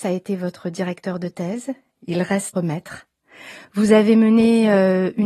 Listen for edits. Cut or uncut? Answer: cut